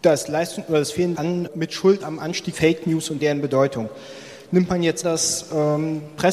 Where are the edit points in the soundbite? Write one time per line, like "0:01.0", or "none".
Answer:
0:01.1
0:01.5
0:02.0
0:02.5
0:03.2
0:05.0